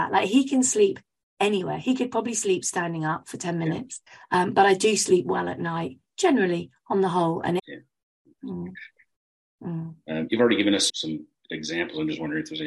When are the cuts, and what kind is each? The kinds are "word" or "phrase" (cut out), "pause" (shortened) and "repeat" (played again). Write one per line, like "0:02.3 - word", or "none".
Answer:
0:04.1 - pause
0:07.6 - phrase
0:10.9 - word